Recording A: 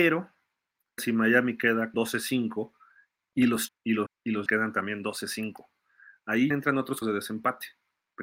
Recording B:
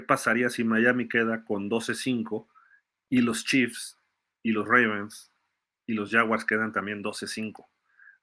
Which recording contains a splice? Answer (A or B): A